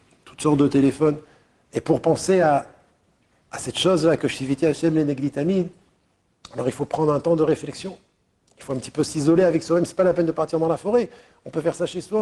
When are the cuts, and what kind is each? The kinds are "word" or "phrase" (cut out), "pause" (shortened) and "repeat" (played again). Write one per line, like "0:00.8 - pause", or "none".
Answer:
none

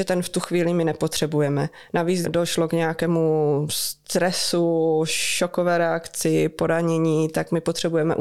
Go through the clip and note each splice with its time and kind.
0:02.2 - phrase

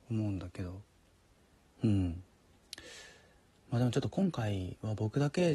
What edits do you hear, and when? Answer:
none

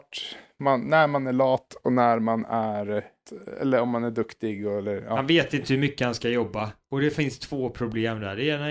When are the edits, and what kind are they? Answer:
none

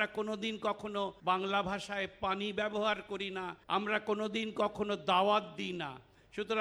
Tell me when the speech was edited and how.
0:01.2 - pause
0:03.6 - pause

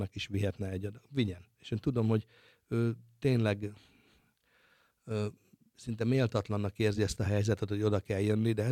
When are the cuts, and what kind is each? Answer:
none

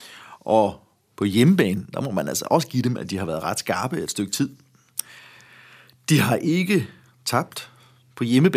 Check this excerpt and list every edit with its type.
none

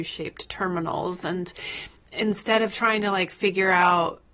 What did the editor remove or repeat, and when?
none

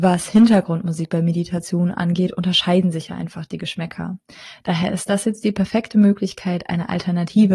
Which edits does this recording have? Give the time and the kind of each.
none

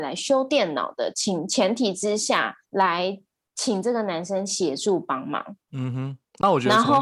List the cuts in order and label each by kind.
0:02.6 - pause
0:05.6 - pause

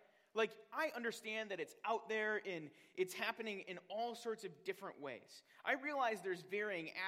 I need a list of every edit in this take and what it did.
none

